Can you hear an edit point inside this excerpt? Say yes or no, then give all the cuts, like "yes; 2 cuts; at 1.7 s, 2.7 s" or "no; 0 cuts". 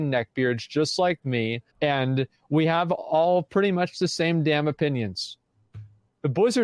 yes; 1 cut; at 1.7 s